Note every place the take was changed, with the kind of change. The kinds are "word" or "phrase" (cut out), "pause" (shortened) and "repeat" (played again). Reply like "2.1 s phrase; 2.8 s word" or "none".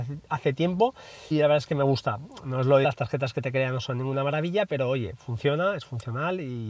1.3 s word; 2.8 s word